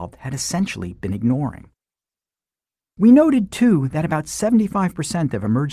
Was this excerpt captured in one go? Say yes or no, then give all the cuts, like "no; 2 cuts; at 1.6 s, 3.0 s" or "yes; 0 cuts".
yes; 0 cuts